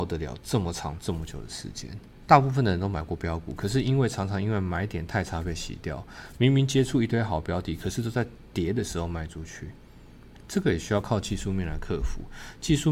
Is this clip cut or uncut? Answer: cut